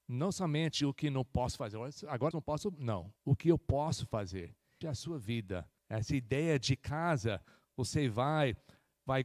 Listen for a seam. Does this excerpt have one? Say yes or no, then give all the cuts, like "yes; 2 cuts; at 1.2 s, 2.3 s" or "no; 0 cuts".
yes; 4 cuts; at 2.3 s, 3.2 s, 4.8 s, 5.8 s